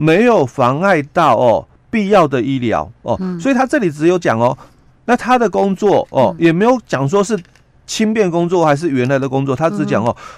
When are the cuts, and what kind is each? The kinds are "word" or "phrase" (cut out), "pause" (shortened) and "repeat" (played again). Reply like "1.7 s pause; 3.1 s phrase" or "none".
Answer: none